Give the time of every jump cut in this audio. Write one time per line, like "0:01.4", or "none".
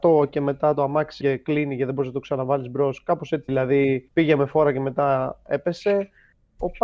0:01.2
0:03.5
0:04.1